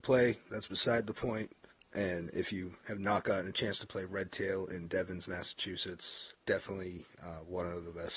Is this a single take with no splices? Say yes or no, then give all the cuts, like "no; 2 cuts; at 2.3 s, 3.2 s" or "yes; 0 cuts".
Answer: no; 2 cuts; at 1.7 s, 6.4 s